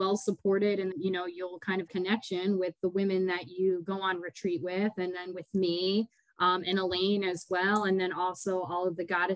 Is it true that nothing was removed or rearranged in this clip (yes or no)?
no